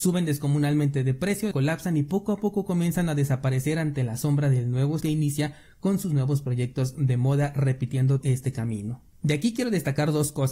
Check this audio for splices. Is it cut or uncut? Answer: cut